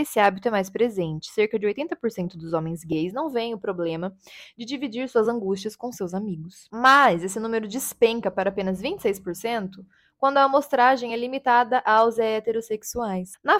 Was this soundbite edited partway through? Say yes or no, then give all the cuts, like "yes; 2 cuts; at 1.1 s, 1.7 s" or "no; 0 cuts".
no; 0 cuts